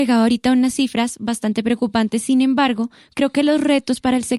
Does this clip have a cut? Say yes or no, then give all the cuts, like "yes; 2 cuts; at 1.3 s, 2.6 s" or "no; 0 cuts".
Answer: no; 0 cuts